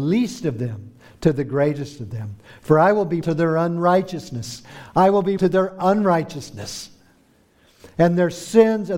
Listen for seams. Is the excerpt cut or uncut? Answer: cut